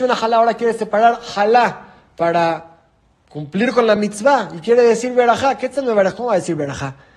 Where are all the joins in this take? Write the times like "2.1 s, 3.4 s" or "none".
none